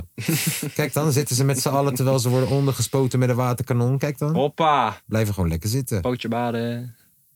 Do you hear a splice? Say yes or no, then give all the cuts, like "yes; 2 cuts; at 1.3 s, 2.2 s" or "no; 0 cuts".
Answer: yes; 1 cut; at 5.0 s